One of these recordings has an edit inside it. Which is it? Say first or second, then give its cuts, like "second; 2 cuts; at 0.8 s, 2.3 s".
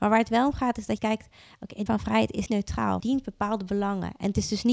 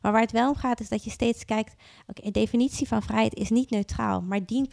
first; 4 cuts; at 1.0 s, 1.9 s, 2.5 s, 3.0 s